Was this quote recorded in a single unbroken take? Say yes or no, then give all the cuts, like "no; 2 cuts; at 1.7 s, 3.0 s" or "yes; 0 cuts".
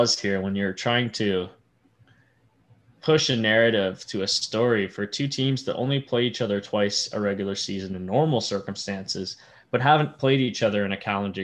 yes; 0 cuts